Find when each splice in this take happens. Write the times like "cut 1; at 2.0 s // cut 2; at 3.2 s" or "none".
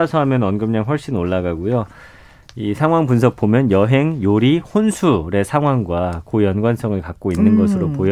none